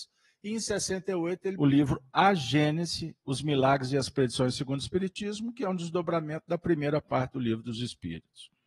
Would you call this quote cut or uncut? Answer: cut